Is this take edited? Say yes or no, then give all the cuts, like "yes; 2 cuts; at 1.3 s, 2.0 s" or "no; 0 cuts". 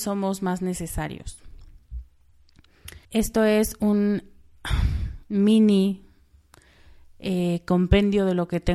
yes; 1 cut; at 3.0 s